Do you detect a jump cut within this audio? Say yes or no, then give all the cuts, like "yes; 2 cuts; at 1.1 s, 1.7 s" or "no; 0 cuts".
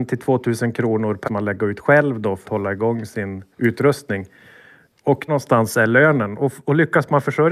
yes; 4 cuts; at 1.2 s, 2.4 s, 3.5 s, 5.3 s